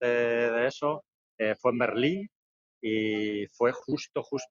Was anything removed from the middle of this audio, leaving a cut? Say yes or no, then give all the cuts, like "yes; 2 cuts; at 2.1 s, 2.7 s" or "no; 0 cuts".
no; 0 cuts